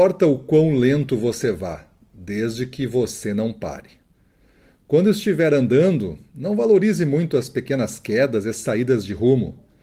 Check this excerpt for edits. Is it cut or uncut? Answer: uncut